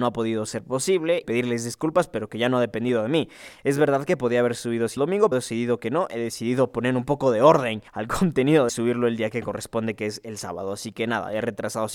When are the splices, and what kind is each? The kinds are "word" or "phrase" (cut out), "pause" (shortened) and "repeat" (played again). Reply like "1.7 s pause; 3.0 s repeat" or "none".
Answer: 1.2 s phrase; 5.0 s word; 5.3 s word; 7.9 s pause; 8.7 s phrase